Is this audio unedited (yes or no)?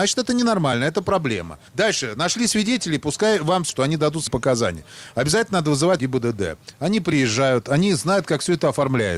no